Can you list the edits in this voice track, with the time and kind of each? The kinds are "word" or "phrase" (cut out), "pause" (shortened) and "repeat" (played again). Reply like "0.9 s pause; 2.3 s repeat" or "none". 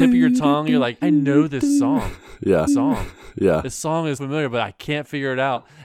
1.0 s word; 2.7 s repeat; 4.2 s word

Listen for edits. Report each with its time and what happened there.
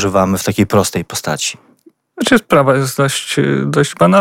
none

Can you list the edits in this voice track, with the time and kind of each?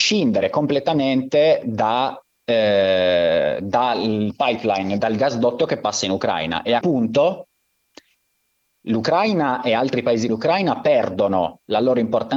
5.0 s word; 6.8 s word; 10.3 s word

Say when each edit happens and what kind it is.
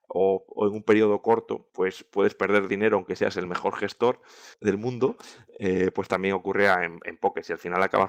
1.7 s pause; 4.5 s pause

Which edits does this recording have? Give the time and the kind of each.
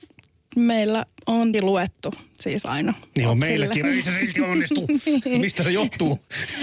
1.5 s word; 3.8 s word

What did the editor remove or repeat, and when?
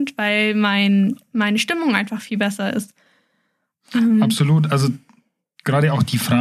1.2 s pause

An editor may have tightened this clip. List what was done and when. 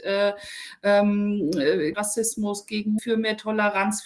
1.9 s word; 3.0 s word

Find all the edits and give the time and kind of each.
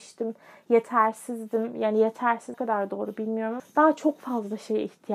2.5 s word; 3.6 s word

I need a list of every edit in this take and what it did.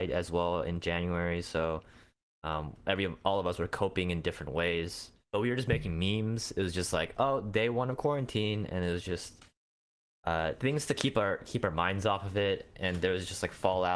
none

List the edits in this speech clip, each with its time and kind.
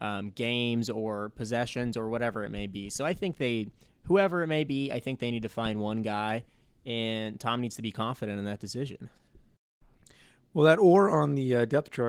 none

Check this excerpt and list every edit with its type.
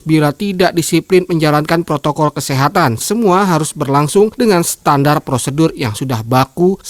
3.0 s word

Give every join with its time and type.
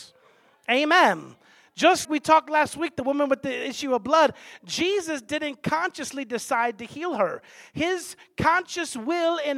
2.0 s word

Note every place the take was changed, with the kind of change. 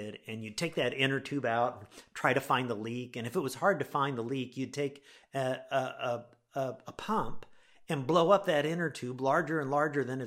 none

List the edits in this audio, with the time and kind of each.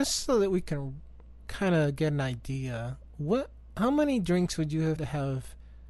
5.0 s word

